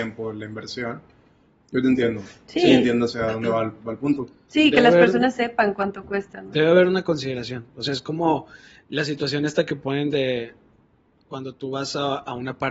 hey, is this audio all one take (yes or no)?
yes